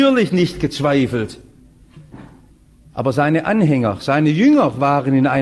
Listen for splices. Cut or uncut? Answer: uncut